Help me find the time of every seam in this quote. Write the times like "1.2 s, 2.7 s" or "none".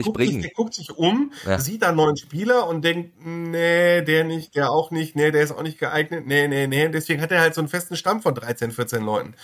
none